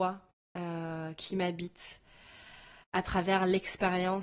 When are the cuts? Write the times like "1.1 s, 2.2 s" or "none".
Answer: 2.8 s